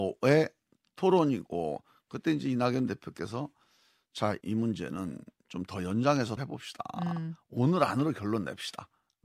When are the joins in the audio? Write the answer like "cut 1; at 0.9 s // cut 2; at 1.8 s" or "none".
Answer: cut 1; at 4.4 s // cut 2; at 6.4 s

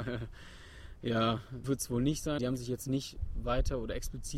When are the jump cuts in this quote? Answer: cut 1; at 1.6 s // cut 2; at 2.4 s

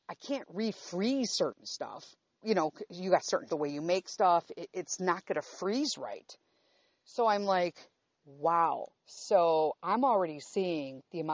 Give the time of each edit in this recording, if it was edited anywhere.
cut 1; at 2.4 s // cut 2; at 3.5 s // cut 3; at 9.0 s

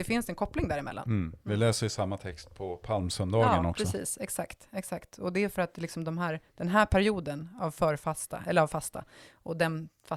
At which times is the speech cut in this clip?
none

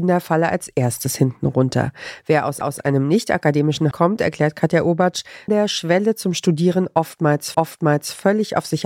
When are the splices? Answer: cut 1; at 2.6 s // cut 2; at 3.9 s // cut 3; at 5.5 s // cut 4; at 7.5 s

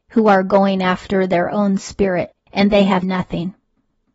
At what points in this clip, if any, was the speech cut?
cut 1; at 3.0 s

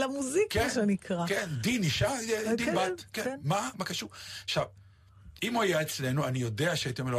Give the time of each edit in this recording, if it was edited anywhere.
cut 1; at 3.7 s

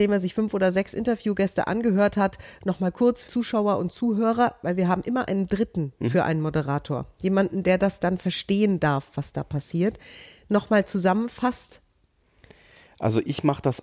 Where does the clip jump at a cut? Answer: cut 1; at 3.3 s

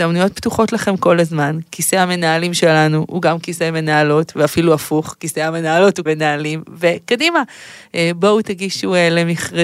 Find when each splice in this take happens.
cut 1; at 6.1 s

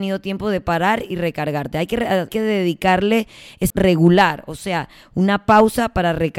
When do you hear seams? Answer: cut 1; at 2.3 s // cut 2; at 3.7 s

